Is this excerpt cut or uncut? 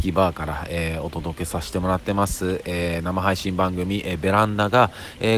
uncut